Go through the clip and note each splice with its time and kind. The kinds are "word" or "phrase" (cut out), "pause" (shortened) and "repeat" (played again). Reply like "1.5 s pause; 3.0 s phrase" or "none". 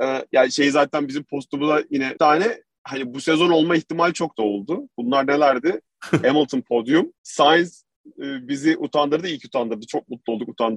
2.2 s phrase; 4.3 s phrase; 7.2 s pause